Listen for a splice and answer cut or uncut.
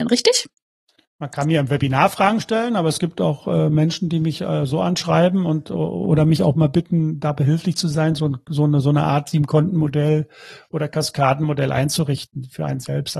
uncut